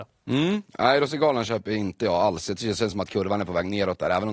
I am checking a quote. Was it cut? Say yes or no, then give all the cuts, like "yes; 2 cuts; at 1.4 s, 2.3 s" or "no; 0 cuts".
no; 0 cuts